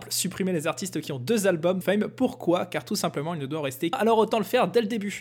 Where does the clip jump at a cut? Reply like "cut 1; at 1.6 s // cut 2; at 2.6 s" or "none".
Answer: cut 1; at 1.8 s // cut 2; at 3.9 s